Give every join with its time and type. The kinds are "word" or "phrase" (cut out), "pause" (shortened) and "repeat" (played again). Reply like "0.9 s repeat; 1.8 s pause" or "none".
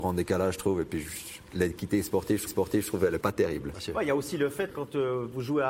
2.5 s repeat; 3.2 s word; 4.7 s word